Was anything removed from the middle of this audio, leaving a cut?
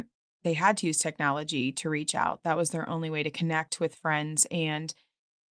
no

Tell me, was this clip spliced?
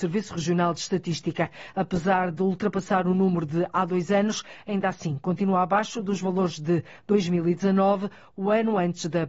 no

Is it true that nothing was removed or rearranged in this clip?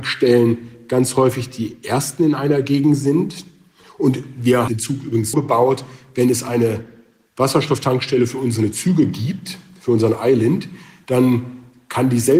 no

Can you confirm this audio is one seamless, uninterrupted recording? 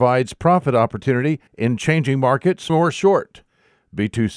no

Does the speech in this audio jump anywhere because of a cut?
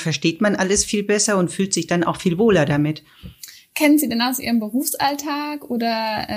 no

